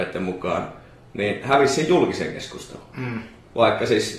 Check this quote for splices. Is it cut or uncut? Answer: uncut